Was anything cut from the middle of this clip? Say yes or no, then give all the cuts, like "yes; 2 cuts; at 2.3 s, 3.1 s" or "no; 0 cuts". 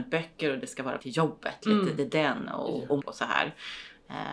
yes; 3 cuts; at 1.0 s, 2.0 s, 3.0 s